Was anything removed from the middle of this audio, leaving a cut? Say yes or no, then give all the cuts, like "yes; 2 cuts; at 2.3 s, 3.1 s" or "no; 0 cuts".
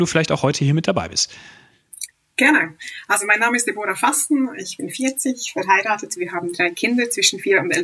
no; 0 cuts